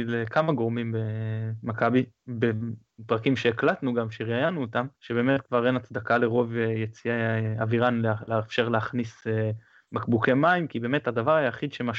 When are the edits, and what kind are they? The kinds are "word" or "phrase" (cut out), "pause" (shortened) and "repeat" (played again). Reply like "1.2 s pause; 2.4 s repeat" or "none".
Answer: 4.9 s pause